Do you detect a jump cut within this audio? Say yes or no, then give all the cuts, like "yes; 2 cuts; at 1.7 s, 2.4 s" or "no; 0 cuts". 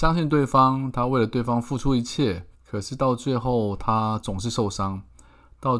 yes; 1 cut; at 2.5 s